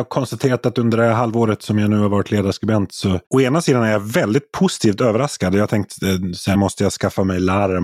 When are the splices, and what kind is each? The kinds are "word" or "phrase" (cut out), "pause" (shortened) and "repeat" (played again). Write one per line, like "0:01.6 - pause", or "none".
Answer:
0:03.2 - pause
0:06.5 - word